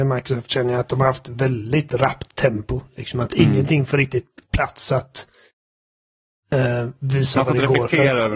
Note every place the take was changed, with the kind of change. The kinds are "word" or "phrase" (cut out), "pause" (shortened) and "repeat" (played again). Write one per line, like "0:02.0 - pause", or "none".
none